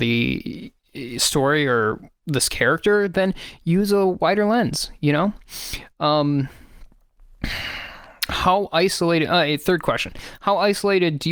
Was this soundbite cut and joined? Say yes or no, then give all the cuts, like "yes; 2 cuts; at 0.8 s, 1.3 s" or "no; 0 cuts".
no; 0 cuts